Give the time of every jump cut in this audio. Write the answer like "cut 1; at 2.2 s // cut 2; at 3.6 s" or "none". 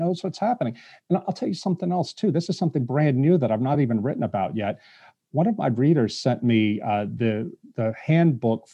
none